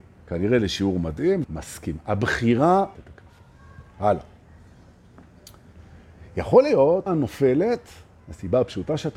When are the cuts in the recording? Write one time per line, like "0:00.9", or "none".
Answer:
0:01.4
0:02.9
0:07.1